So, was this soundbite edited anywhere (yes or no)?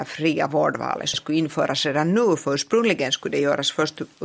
yes